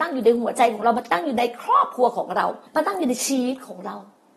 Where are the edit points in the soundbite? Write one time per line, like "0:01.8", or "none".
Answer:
0:02.7